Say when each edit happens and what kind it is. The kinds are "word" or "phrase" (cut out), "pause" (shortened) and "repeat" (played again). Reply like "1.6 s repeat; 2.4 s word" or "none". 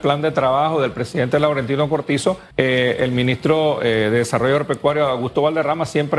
2.5 s pause